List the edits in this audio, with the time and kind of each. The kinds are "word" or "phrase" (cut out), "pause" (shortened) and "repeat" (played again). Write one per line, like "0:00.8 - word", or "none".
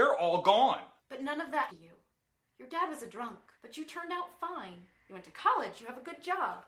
0:01.0 - pause
0:01.7 - word
0:03.5 - pause